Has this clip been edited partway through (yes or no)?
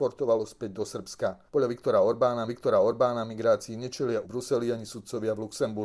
yes